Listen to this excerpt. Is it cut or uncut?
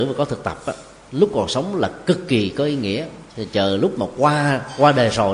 uncut